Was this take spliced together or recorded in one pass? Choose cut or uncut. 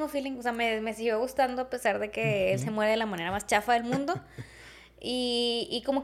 uncut